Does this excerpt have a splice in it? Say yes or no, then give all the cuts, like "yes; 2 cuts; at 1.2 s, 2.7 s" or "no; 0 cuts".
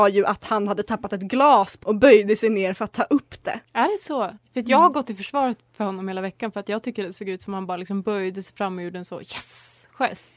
yes; 3 cuts; at 1.8 s, 3.6 s, 4.4 s